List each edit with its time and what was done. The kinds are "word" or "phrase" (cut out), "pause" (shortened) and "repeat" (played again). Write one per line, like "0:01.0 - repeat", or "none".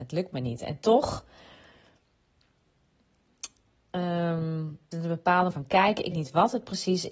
0:04.9 - word
0:05.5 - word
0:06.1 - word

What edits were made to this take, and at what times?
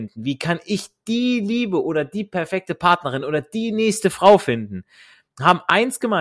none

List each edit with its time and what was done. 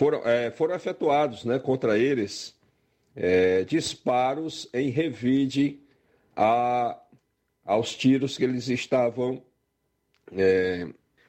none

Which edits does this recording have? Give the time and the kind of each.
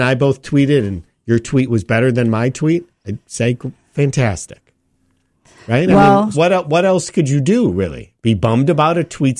0:06.3 - word

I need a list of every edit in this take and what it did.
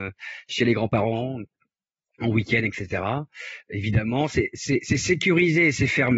none

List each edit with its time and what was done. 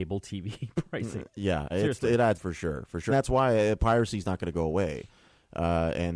0:01.7 - word
0:02.3 - word
0:03.1 - word

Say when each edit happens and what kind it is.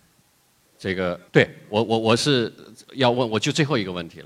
0:01.3 - pause

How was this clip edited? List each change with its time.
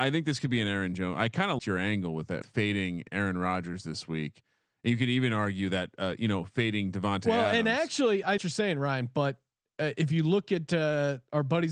0:01.6 - word
0:02.4 - word
0:08.4 - phrase

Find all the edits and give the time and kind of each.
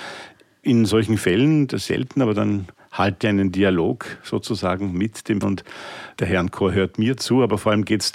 0:01.9 - word
0:03.2 - word
0:05.4 - word
0:06.2 - word

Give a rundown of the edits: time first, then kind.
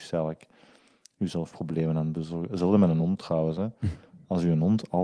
none

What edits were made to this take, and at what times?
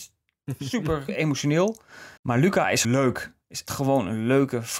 0:01.1 - word
0:02.2 - pause
0:02.8 - word
0:03.7 - word

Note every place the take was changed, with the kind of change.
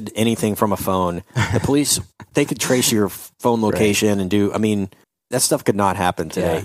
0:05.0 - pause

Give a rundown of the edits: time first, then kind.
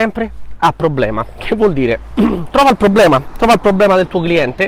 none

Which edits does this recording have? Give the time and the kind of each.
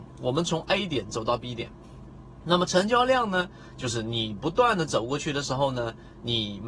none

